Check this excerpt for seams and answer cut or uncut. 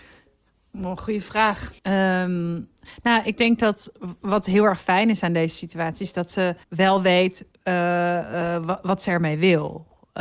cut